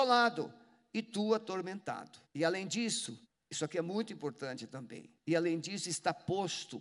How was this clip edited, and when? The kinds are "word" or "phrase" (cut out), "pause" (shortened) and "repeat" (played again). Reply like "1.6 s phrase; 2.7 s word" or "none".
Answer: 2.2 s pause; 3.2 s pause; 5.2 s pause